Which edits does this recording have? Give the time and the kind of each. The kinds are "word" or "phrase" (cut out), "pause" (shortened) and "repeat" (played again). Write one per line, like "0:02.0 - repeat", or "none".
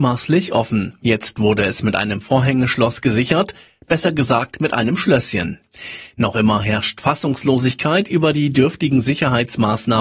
none